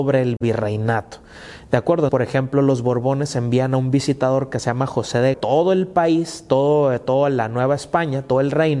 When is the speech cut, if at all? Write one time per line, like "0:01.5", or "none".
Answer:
0:02.1
0:05.3